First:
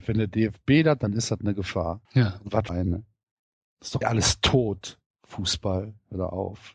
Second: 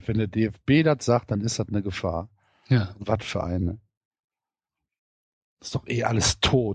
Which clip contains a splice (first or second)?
first